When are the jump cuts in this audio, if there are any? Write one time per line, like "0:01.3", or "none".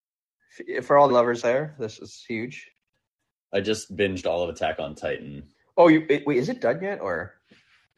0:01.1
0:01.4
0:02.0
0:02.9
0:05.5

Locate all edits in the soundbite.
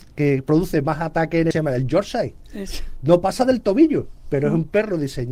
0:01.5

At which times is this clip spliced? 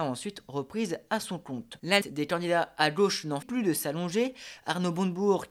0:02.0
0:03.4

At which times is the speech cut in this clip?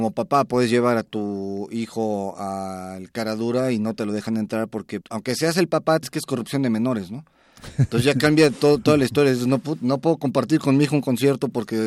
0:05.0
0:06.0

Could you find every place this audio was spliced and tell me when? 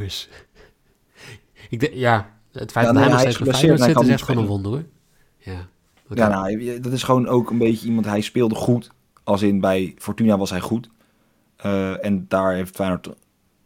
0:01.9

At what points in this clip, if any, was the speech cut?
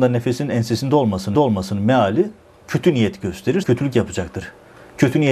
0:01.3
0:03.6

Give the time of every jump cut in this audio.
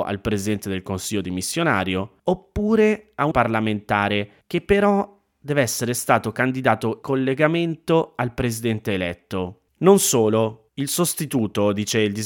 0:02.2
0:03.3
0:04.4
0:07.0
0:09.7
0:10.7

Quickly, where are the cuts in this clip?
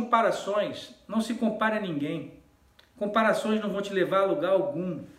none

